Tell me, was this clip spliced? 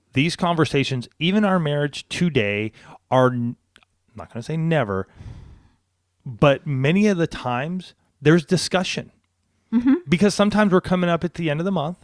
no; 0 cuts

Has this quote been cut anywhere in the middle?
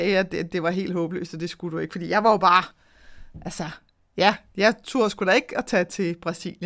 no; 0 cuts

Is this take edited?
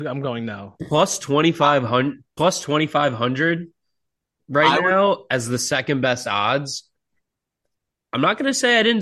no; 0 cuts

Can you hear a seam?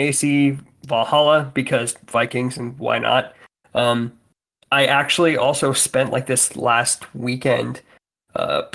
no; 0 cuts

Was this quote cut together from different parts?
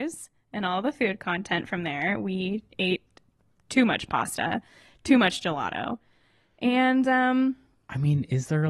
no; 0 cuts

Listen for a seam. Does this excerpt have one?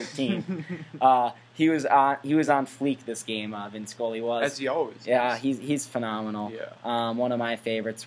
no; 0 cuts

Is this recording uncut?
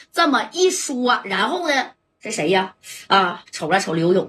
yes; 0 cuts

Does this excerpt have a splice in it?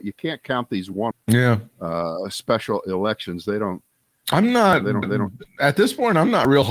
yes; 2 cuts; at 1.1 s, 5.0 s

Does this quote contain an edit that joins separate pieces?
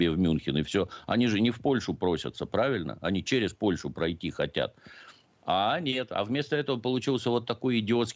no; 0 cuts

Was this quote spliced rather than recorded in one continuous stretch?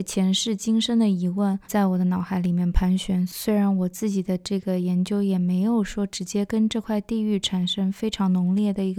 yes; 1 cut; at 1.6 s

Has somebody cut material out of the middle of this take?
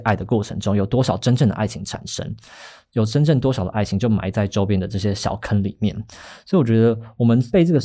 no; 0 cuts

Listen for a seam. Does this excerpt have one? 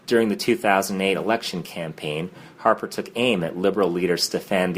no; 0 cuts

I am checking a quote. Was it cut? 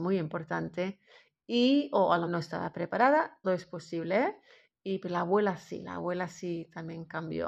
yes; 2 cuts; at 2.3 s, 3.4 s

